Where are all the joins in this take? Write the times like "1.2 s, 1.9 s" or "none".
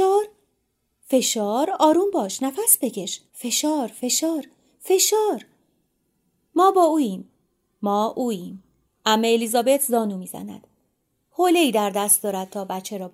3.3 s, 8.9 s

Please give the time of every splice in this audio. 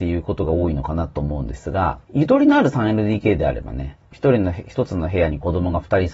2.0 s, 4.0 s

